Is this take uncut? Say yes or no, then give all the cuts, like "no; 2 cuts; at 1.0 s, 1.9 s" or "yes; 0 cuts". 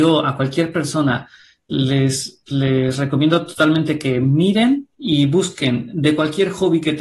no; 1 cut; at 4.9 s